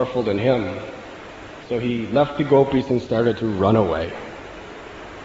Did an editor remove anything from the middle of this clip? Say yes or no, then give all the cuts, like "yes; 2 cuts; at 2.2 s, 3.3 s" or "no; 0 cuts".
no; 0 cuts